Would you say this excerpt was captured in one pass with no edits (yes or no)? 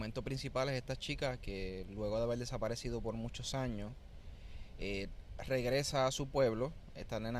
yes